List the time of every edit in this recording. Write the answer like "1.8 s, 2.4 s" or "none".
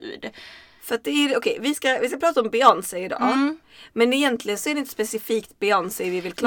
none